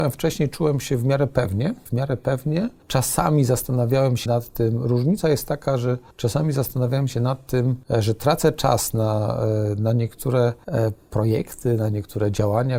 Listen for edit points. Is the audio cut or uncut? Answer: cut